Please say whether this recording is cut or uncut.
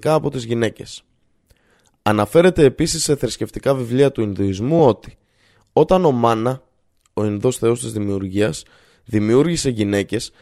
uncut